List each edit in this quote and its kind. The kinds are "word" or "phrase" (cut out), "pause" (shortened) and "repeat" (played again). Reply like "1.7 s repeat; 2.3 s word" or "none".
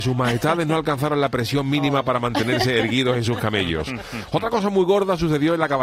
none